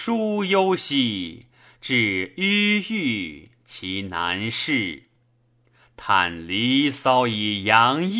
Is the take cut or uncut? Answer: uncut